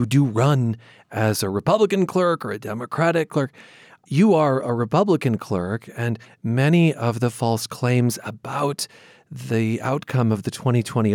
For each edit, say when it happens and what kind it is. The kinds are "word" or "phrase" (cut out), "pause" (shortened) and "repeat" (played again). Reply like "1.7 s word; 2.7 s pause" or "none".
none